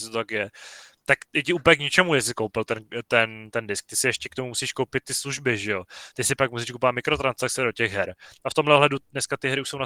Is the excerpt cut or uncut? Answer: uncut